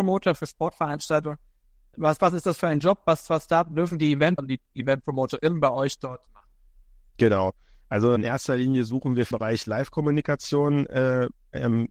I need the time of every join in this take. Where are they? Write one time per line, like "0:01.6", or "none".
0:04.4
0:06.3
0:08.2
0:09.3

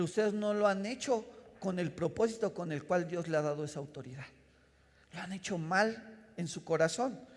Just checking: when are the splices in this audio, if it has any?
none

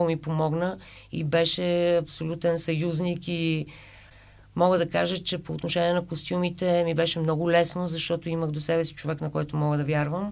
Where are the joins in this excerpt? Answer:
none

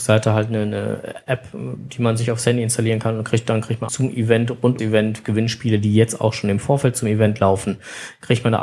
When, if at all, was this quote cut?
0:03.9
0:04.8

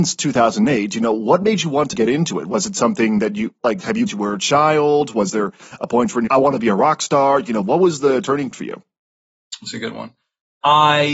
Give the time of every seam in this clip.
0:01.9
0:04.1
0:06.3
0:08.5

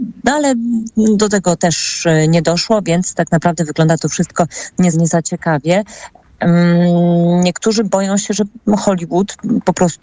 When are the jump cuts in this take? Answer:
0:04.9

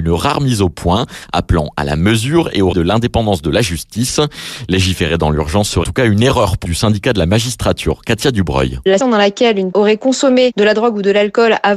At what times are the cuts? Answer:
0:02.7
0:05.8
0:06.7
0:09.0
0:09.7

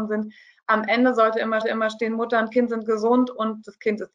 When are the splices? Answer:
0:01.6

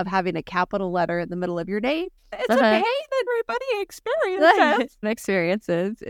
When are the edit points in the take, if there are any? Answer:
0:02.2
0:03.3
0:05.0

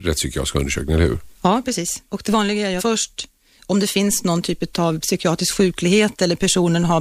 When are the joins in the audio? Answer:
0:01.3
0:02.1
0:02.8

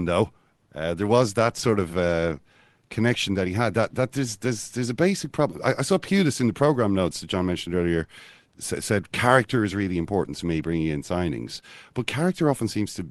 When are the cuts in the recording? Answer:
none

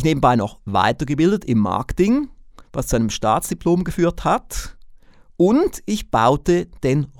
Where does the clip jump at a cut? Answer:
none

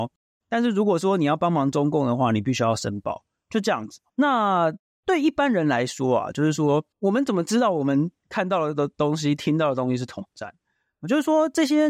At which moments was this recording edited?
0:04.1
0:06.9

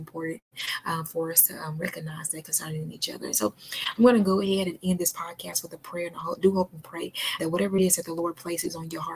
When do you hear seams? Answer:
0:07.4

